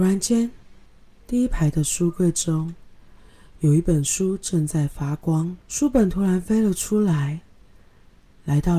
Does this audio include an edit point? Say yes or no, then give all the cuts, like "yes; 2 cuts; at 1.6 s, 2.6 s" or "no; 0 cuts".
yes; 1 cut; at 5.6 s